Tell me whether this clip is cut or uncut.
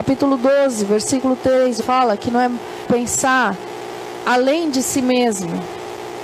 cut